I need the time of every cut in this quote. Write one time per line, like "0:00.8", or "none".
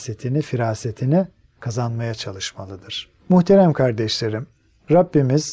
0:01.4